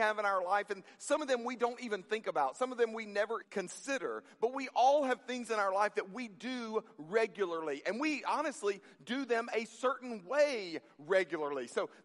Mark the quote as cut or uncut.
cut